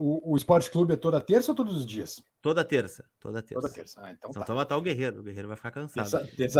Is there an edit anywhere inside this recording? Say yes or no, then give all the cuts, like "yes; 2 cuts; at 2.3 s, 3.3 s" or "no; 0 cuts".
yes; 1 cut; at 2.3 s